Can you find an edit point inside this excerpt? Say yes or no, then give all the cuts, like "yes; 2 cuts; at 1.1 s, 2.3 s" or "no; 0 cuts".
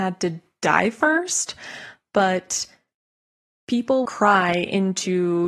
yes; 1 cut; at 4.1 s